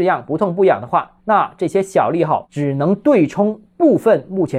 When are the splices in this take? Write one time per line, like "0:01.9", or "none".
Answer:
0:01.2